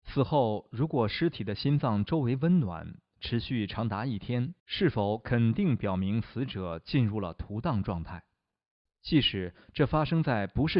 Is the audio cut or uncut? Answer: cut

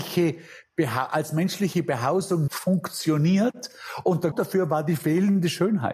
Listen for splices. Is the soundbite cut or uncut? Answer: cut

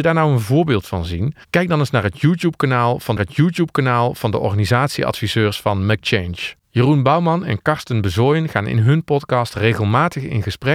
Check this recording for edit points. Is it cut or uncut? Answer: cut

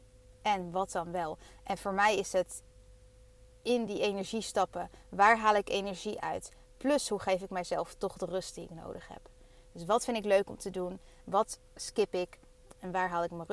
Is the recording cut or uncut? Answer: uncut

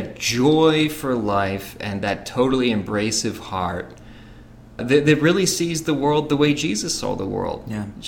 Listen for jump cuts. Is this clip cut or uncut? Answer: cut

